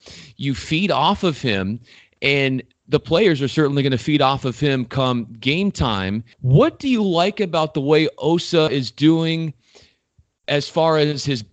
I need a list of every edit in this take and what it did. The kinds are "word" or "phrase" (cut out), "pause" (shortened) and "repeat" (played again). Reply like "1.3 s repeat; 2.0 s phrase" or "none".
6.3 s pause